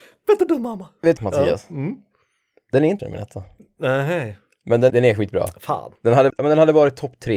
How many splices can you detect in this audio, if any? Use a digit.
4